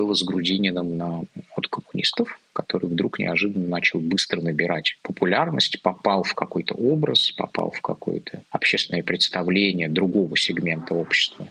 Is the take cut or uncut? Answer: uncut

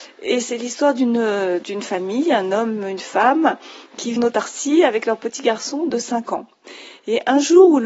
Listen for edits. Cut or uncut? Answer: cut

